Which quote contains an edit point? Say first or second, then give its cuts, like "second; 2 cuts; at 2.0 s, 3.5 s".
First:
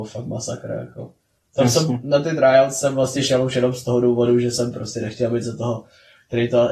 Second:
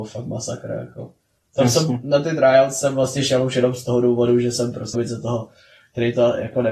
second; 1 cut; at 4.9 s